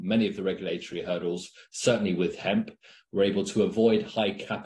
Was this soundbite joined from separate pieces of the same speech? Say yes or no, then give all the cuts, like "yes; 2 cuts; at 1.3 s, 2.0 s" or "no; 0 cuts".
no; 0 cuts